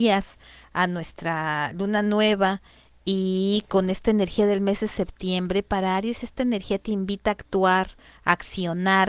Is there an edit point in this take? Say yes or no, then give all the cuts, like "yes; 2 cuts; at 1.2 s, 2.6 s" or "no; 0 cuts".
no; 0 cuts